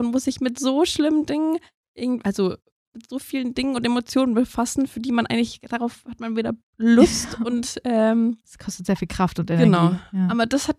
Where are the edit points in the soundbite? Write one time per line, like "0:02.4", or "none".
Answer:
none

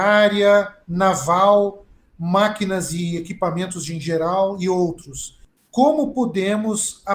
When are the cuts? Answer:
none

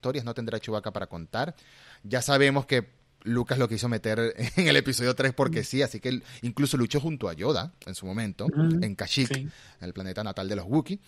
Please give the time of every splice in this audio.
0:04.3

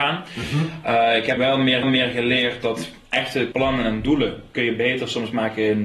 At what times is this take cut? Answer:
0:01.4
0:01.8
0:03.5

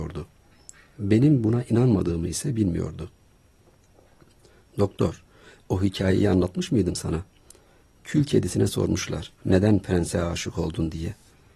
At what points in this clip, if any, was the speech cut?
0:09.4

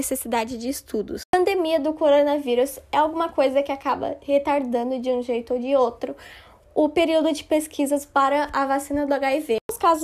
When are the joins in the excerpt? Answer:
none

